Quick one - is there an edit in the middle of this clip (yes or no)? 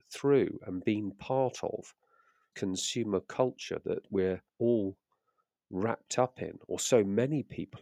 yes